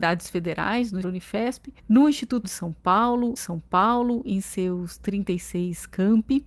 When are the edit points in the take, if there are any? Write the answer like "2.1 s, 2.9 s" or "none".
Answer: 1.0 s, 1.8 s, 2.4 s, 3.4 s

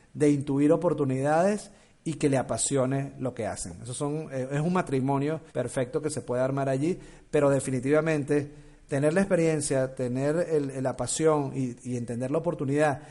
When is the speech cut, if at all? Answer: 5.5 s

